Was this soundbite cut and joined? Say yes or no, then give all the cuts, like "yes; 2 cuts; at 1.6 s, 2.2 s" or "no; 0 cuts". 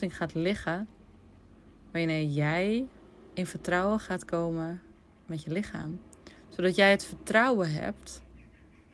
no; 0 cuts